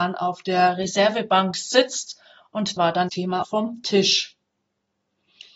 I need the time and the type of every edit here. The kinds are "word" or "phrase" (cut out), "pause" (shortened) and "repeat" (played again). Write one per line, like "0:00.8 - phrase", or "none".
0:02.8 - word
0:03.1 - word
0:03.4 - word